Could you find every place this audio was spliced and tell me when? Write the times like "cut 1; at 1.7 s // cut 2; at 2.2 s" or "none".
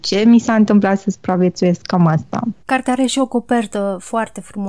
cut 1; at 2.6 s